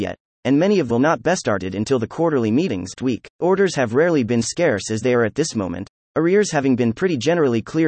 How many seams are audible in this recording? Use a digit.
4